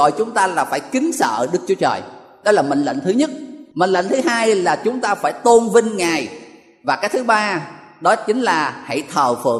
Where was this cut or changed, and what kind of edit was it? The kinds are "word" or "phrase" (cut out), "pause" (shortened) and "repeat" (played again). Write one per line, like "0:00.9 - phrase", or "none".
none

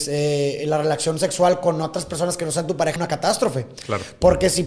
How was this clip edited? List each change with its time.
0:03.0 - word

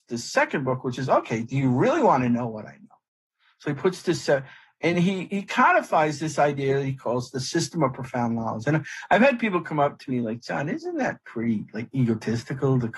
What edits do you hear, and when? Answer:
none

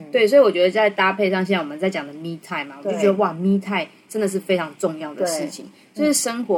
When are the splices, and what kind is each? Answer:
none

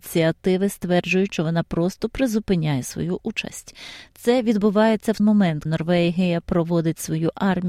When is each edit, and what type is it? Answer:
0:01.4 - word
0:05.2 - word
0:05.7 - word

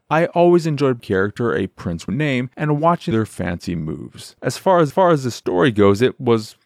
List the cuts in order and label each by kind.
0:01.0 - phrase
0:02.1 - phrase
0:03.1 - phrase
0:04.9 - repeat

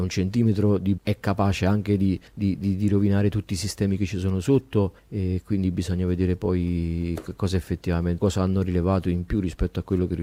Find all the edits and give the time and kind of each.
0:01.0 - word
0:02.3 - pause
0:05.0 - pause
0:08.2 - phrase

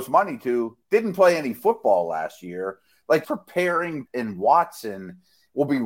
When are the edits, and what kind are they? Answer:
0:03.2 - word
0:04.1 - word

